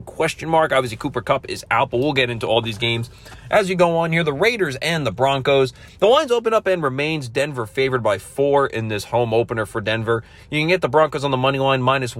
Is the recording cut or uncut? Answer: uncut